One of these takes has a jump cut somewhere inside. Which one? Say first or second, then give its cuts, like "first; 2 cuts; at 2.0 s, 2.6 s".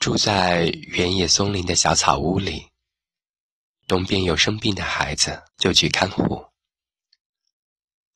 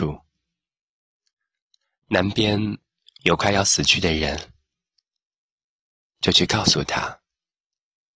first; 2 cuts; at 3.3 s, 5.5 s